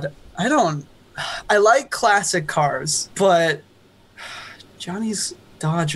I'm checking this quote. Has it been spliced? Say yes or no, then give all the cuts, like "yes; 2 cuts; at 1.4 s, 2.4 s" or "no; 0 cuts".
yes; 1 cut; at 3.1 s